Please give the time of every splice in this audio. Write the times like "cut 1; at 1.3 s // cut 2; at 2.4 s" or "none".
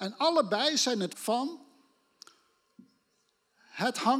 cut 1; at 1.1 s